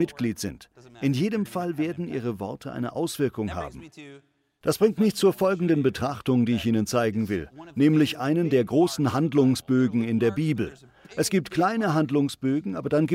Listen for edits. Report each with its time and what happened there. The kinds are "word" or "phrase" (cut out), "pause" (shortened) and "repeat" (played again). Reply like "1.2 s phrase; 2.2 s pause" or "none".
none